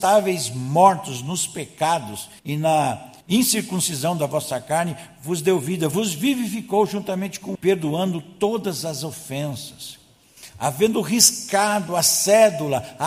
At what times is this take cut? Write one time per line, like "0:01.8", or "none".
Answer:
0:02.4
0:03.2
0:07.5